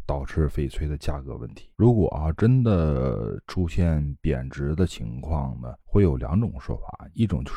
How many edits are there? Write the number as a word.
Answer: two